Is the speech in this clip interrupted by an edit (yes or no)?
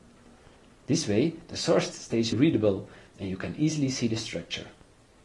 yes